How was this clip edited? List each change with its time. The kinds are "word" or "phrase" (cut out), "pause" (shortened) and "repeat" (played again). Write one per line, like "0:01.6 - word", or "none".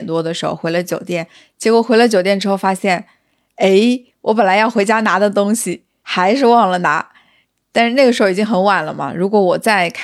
none